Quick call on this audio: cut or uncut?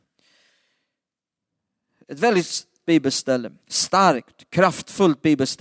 cut